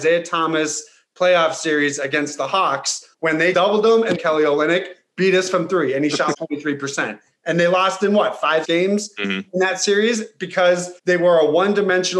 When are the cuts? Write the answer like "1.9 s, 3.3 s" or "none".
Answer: 3.1 s, 3.5 s, 4.1 s, 6.3 s, 8.6 s, 11.0 s

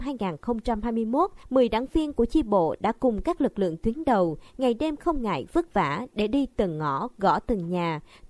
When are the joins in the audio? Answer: none

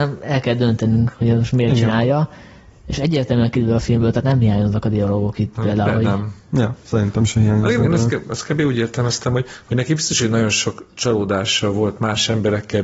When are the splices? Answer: none

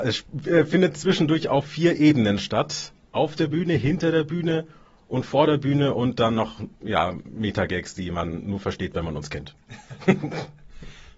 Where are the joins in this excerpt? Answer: 6.7 s

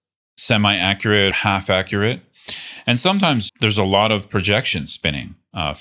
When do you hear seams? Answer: 1.3 s, 3.5 s

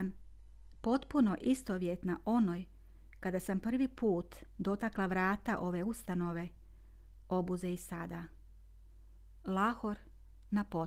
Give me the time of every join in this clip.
none

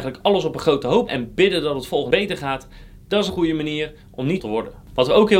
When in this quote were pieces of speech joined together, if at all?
1.1 s, 2.1 s, 3.3 s, 4.4 s

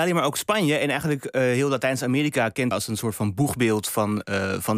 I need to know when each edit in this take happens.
2.7 s

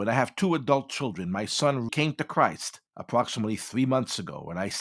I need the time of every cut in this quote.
1.9 s, 2.9 s

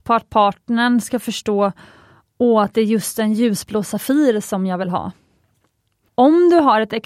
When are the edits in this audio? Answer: none

